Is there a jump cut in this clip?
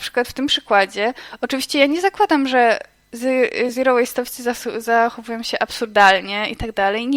no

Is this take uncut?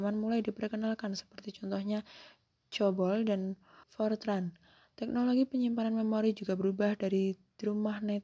no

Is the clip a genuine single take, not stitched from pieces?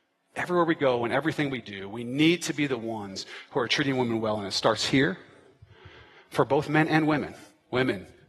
yes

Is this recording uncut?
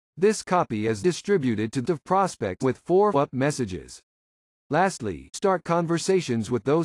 no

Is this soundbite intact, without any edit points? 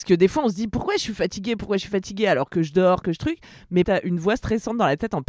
no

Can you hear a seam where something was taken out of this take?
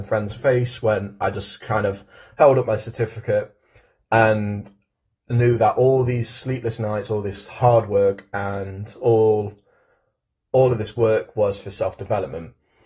no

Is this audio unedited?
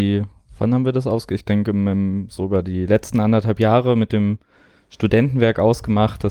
yes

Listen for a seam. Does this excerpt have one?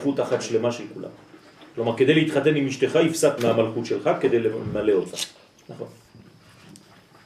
yes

